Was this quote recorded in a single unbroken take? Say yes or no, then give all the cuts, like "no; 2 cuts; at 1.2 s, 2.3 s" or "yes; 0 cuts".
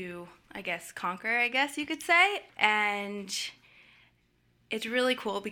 yes; 0 cuts